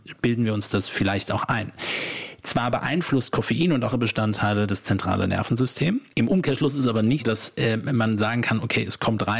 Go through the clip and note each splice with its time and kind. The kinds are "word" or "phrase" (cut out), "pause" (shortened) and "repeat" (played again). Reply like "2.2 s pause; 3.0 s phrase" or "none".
3.9 s word; 7.2 s word